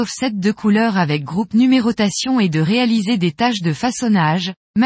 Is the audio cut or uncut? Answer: uncut